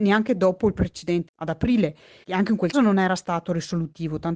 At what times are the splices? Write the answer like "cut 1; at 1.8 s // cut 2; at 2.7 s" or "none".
cut 1; at 1.3 s // cut 2; at 2.2 s // cut 3; at 2.7 s